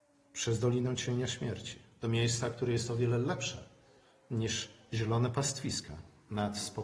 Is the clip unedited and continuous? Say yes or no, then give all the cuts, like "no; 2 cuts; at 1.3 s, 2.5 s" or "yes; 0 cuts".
yes; 0 cuts